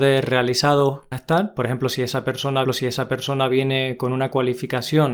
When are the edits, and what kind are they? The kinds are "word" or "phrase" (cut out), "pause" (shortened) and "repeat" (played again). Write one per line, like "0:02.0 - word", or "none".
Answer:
0:01.1 - word
0:02.6 - repeat

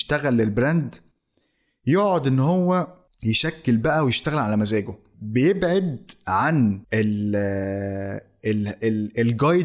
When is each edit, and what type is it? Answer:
0:06.8 - pause

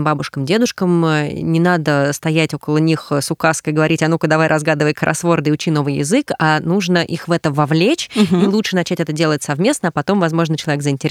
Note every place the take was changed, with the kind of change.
none

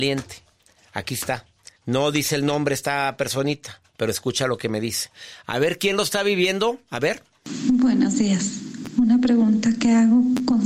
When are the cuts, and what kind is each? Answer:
0:01.8 - pause
0:03.9 - pause

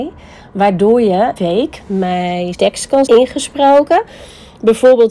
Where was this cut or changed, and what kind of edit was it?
0:01.4 - phrase
0:02.5 - word
0:03.1 - word

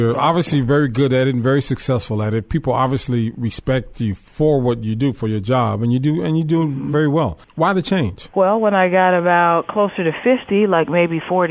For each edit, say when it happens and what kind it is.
0:07.4 - pause

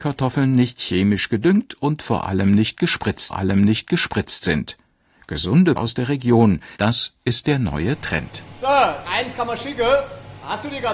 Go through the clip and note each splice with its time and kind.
0:03.3 - repeat
0:05.8 - word
0:06.8 - pause
0:09.1 - word

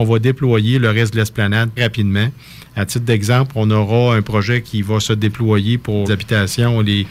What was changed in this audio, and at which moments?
0:01.8 - word
0:06.1 - word

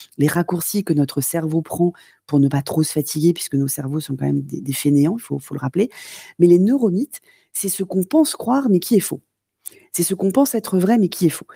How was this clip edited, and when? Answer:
none

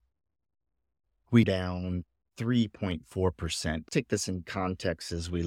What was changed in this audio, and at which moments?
0:01.4 - word
0:03.9 - word

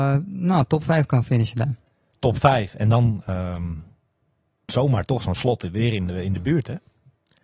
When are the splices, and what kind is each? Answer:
0:04.7 - word

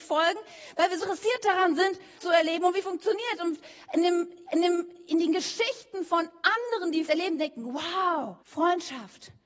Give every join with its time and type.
0:01.0 - word
0:02.2 - word
0:02.8 - word
0:04.5 - repeat
0:07.1 - word
0:08.4 - pause

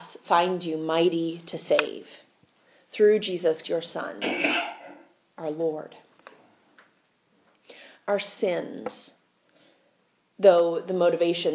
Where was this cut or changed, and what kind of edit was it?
0:03.6 - word

